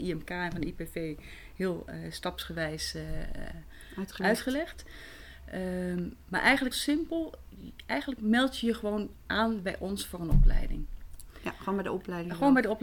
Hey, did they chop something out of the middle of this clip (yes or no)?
yes